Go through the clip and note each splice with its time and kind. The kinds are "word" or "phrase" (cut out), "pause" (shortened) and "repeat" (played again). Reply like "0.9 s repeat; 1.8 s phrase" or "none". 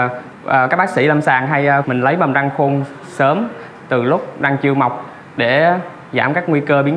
1.8 s phrase